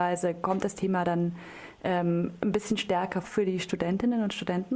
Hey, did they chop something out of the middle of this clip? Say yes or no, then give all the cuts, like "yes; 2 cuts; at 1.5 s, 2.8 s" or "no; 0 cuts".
yes; 1 cut; at 3.2 s